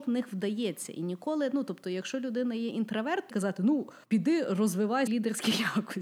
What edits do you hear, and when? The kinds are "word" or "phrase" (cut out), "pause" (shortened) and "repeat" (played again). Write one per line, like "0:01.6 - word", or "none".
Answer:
0:03.3 - phrase
0:04.0 - pause
0:05.1 - word